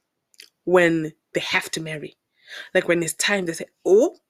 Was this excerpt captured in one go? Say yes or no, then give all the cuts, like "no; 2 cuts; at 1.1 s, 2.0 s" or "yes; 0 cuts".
yes; 0 cuts